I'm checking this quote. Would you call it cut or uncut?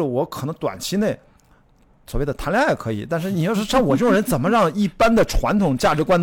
uncut